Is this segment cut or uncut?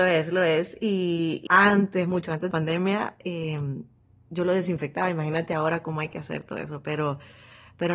cut